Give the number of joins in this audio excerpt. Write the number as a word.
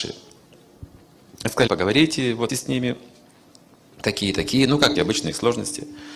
three